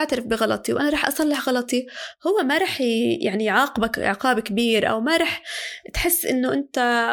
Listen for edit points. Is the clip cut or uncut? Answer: uncut